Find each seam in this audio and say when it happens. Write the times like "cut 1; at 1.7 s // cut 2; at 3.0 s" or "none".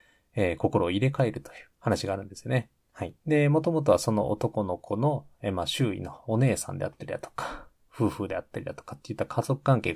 cut 1; at 1.7 s // cut 2; at 2.8 s // cut 3; at 3.2 s